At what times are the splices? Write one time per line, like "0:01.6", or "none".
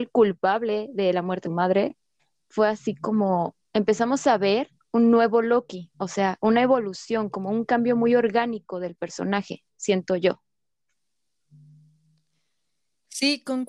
0:01.4
0:02.2
0:03.6
0:04.8
0:05.9